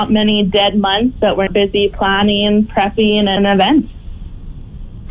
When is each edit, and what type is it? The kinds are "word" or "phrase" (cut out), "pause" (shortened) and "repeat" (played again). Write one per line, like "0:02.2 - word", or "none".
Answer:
0:01.5 - word
0:03.4 - word